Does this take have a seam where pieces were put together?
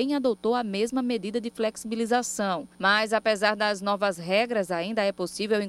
no; 0 cuts

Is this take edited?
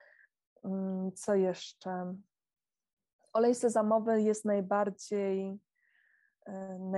no; 0 cuts

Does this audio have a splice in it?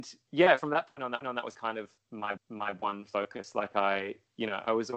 yes; 2 cuts; at 1.2 s, 2.4 s

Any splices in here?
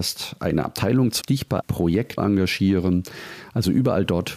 yes; 3 cuts; at 1.2 s, 1.6 s, 2.2 s

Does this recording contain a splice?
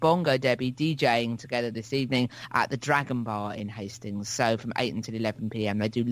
no; 0 cuts

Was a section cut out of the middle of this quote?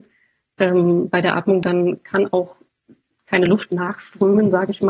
no; 0 cuts

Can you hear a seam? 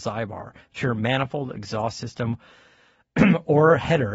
no; 0 cuts

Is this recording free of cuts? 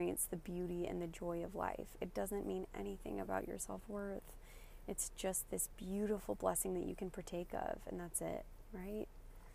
yes; 0 cuts

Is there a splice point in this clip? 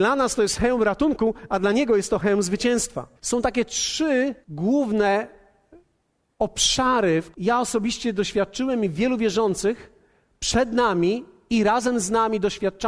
yes; 3 cuts; at 3.2 s, 4.4 s, 7.3 s

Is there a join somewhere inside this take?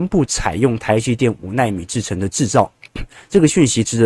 no; 0 cuts

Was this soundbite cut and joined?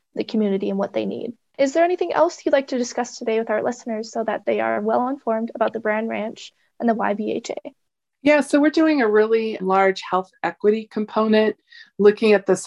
yes; 1 cut; at 9.6 s

